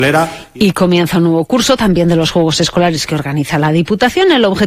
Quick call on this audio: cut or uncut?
uncut